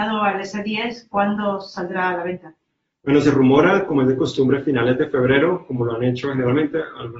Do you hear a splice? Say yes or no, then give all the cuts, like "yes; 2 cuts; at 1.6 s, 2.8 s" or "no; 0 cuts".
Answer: no; 0 cuts